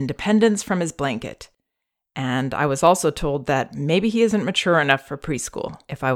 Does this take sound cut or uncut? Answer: uncut